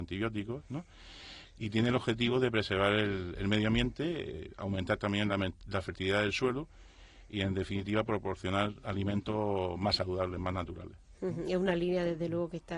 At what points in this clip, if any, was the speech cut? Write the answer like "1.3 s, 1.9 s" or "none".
none